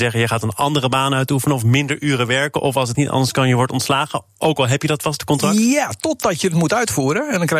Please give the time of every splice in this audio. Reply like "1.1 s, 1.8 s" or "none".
2.9 s